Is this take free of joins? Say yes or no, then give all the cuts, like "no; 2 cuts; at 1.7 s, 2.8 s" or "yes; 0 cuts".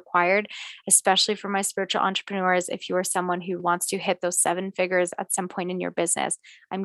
no; 1 cut; at 3.6 s